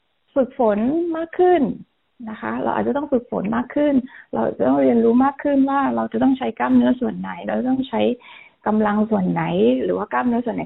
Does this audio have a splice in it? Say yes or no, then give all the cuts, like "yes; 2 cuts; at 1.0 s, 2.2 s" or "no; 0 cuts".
no; 0 cuts